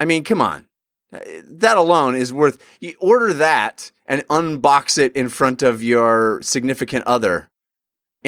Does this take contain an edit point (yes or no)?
no